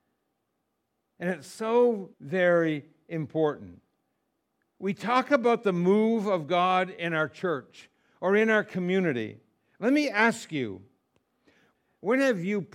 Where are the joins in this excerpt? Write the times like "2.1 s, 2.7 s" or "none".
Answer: 2.1 s